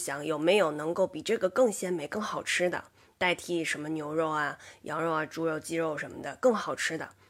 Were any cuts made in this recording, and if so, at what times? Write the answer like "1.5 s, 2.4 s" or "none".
none